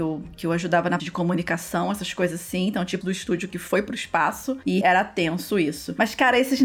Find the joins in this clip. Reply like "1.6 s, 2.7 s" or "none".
1.0 s, 3.0 s, 4.8 s